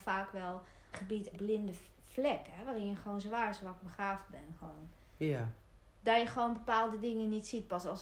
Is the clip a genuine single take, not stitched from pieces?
no; 2 cuts; at 0.9 s, 1.3 s

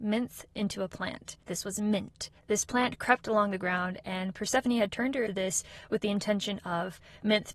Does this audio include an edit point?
yes; 3 cuts; at 1.4 s, 2.4 s, 5.3 s

